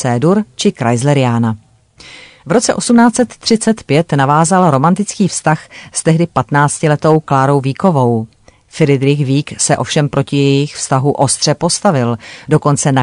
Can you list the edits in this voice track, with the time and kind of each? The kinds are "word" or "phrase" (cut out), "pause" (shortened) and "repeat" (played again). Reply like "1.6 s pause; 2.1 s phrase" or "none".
none